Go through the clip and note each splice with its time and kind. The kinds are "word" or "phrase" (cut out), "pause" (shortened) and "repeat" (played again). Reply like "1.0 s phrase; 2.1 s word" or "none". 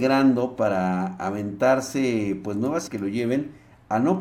2.9 s word